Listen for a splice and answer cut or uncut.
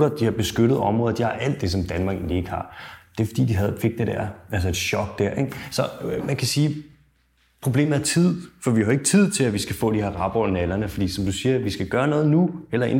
uncut